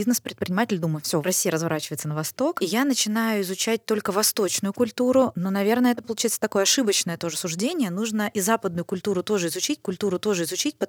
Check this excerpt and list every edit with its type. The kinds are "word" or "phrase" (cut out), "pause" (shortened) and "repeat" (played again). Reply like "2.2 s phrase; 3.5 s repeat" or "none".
9.8 s repeat